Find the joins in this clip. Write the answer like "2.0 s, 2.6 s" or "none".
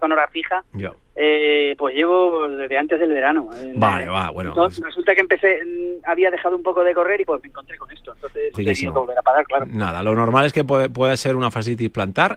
7.2 s, 8.5 s